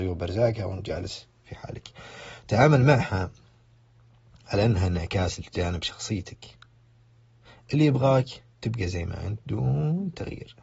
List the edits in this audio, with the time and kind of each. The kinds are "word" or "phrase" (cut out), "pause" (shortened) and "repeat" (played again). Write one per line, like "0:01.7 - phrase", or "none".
0:08.5 - pause